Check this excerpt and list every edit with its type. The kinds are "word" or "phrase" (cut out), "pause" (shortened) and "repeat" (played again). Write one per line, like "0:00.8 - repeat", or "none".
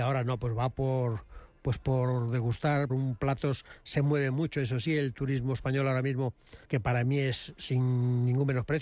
0:02.9 - phrase
0:06.6 - pause